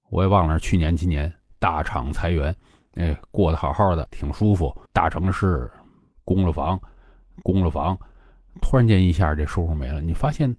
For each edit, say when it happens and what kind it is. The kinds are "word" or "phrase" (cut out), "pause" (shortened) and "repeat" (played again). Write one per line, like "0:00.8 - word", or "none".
0:04.0 - word
0:04.9 - pause
0:07.4 - repeat